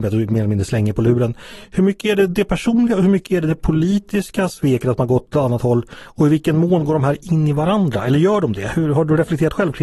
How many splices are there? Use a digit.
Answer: 0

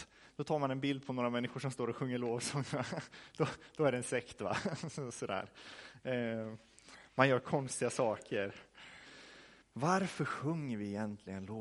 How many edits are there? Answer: 1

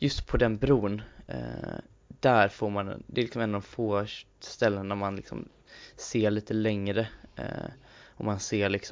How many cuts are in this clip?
0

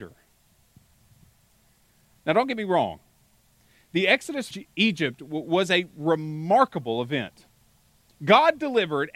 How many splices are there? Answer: 1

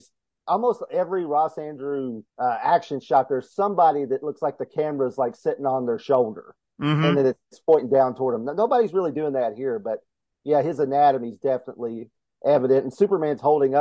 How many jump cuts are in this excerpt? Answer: 1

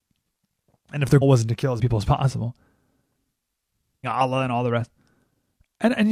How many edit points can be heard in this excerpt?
3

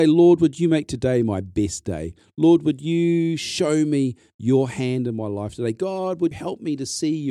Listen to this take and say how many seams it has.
1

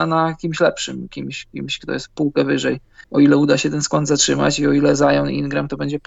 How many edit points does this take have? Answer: 1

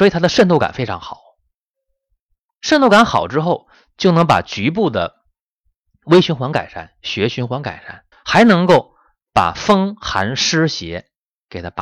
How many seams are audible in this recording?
1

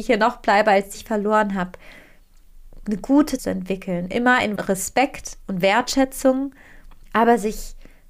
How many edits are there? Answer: 3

